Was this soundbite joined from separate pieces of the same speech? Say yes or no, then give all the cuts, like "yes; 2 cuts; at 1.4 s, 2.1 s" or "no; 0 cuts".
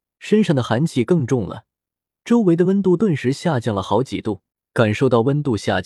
yes; 1 cut; at 4.5 s